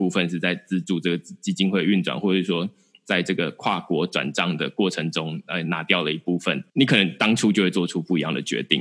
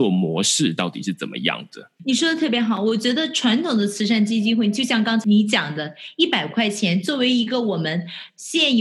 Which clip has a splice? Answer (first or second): second